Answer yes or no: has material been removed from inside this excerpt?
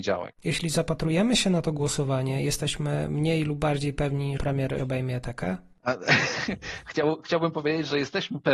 yes